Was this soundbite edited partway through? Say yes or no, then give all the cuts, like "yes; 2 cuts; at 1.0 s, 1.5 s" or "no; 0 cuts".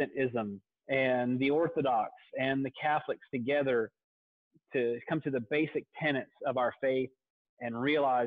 no; 0 cuts